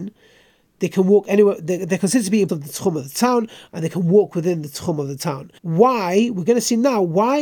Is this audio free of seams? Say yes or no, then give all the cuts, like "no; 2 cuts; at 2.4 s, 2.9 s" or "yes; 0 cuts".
no; 2 cuts; at 2.5 s, 5.6 s